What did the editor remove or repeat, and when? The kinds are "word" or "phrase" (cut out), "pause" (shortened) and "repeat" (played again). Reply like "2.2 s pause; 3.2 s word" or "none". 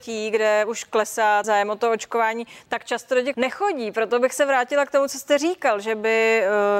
1.4 s word; 3.3 s word